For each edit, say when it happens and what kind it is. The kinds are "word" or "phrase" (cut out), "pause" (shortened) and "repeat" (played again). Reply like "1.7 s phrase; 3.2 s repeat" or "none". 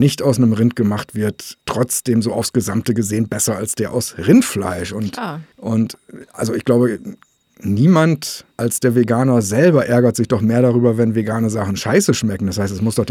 1.6 s pause; 5.5 s pause; 8.5 s pause